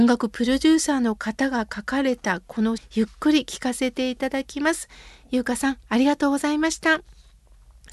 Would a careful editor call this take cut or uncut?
cut